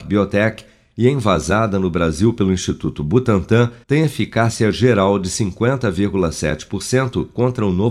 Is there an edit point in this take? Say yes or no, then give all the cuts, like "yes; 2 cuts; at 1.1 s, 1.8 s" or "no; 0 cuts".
yes; 1 cut; at 3.8 s